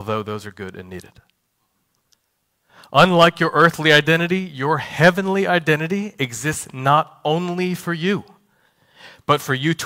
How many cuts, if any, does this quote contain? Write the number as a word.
zero